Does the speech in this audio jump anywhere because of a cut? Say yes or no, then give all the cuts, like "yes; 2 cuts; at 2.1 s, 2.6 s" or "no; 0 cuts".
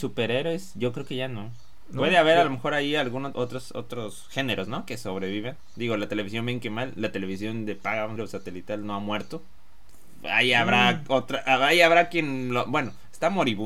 yes; 2 cuts; at 3.3 s, 8.2 s